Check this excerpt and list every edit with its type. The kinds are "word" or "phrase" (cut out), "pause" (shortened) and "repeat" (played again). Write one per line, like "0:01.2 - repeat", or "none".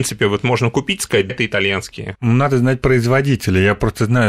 0:01.3 - word